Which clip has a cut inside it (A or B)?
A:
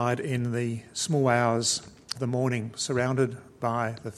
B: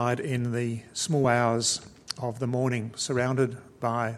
A